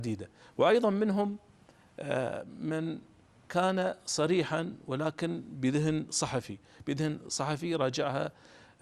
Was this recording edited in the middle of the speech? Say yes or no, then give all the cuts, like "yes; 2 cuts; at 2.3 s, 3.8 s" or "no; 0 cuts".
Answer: no; 0 cuts